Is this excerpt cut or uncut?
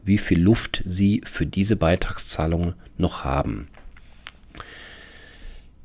uncut